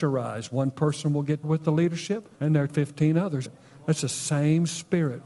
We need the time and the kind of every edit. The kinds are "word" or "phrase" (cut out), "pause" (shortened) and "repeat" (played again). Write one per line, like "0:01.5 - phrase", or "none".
0:01.4 - word
0:02.3 - pause
0:02.7 - word
0:03.4 - word